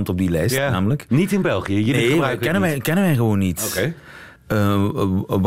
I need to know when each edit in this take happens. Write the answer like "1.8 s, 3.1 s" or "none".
4.4 s